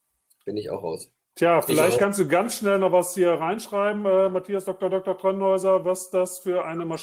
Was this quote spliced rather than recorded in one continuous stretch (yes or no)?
no